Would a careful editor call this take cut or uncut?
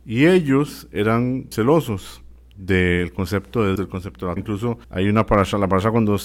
cut